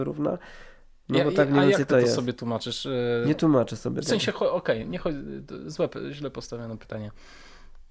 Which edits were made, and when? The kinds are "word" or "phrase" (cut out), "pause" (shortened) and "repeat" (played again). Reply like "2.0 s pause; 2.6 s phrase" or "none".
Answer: none